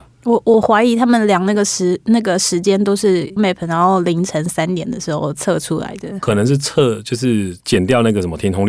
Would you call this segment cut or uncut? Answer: cut